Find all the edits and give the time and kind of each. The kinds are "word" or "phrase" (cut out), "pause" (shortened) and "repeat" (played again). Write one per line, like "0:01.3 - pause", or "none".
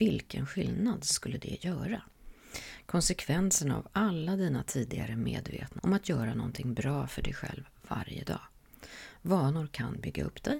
0:05.8 - word